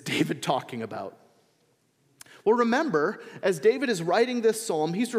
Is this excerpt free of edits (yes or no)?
yes